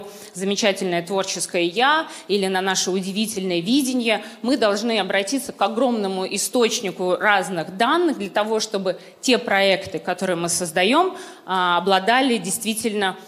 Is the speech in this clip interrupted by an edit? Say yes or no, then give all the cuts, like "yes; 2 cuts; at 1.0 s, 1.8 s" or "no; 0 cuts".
no; 0 cuts